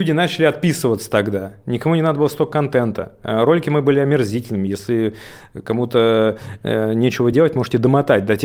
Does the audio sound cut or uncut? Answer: uncut